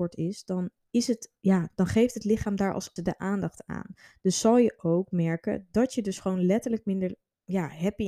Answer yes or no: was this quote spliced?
yes